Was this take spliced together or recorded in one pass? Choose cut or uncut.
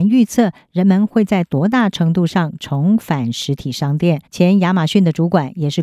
cut